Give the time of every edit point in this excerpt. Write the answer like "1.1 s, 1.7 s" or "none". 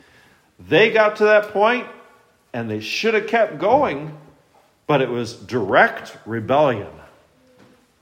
none